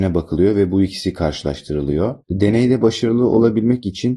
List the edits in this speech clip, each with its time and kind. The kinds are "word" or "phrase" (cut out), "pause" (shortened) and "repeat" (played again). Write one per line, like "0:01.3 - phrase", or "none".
0:02.2 - pause